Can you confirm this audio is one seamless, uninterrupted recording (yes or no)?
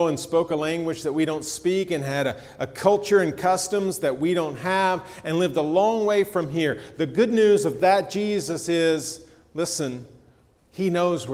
yes